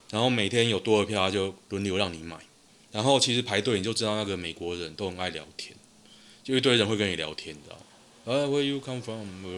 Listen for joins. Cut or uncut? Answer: uncut